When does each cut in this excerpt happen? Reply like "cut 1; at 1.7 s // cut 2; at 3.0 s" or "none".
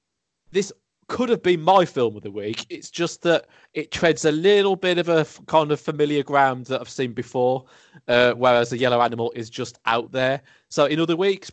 none